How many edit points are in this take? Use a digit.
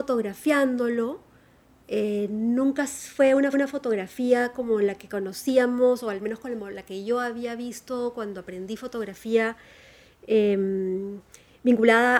1